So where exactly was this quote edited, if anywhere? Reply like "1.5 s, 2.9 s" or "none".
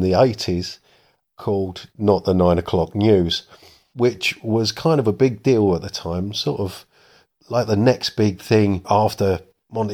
none